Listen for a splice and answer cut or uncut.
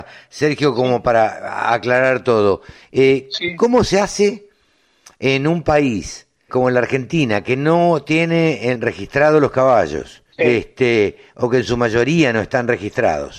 cut